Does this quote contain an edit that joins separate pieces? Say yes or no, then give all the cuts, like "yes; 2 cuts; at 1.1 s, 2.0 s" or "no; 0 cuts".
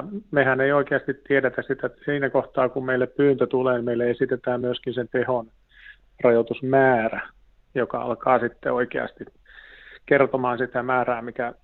no; 0 cuts